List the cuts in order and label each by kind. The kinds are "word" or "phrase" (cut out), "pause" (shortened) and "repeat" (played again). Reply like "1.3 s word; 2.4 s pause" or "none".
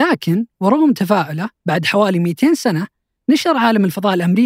1.6 s pause